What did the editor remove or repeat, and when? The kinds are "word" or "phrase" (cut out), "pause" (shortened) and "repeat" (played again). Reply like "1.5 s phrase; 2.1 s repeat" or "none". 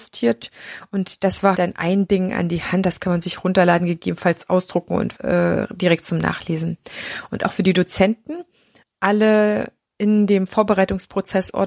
1.5 s word; 5.2 s word; 8.8 s word

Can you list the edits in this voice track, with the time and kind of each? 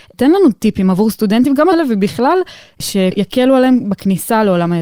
1.7 s word

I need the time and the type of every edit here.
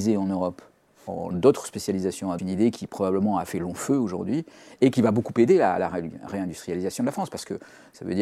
1.3 s word; 2.4 s phrase

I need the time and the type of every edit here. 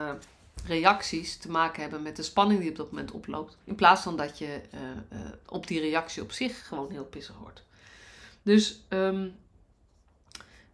3.6 s pause

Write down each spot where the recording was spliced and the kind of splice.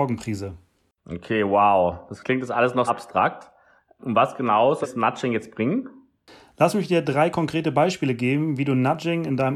2.9 s word; 4.0 s word; 4.8 s word

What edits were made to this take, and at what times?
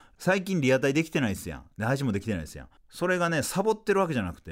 2.8 s pause

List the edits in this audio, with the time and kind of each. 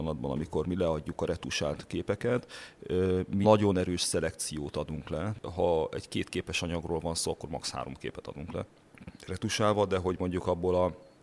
3.4 s word

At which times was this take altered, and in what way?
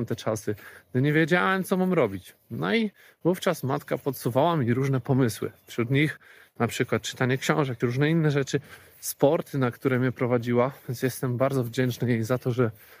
7.8 s word

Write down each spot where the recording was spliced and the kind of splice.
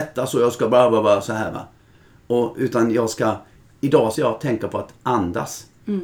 4.1 s word

